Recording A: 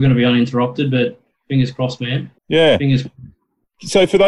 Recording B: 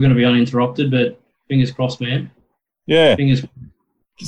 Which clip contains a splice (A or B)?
A